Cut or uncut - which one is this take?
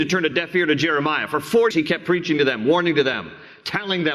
cut